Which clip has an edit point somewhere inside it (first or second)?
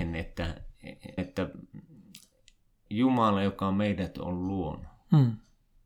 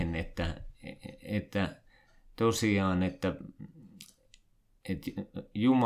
first